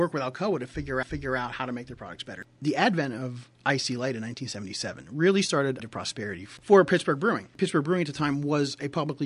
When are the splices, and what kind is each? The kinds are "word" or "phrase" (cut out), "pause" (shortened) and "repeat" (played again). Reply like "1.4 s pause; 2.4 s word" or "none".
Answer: 1.0 s repeat; 3.6 s pause; 5.8 s phrase; 7.5 s pause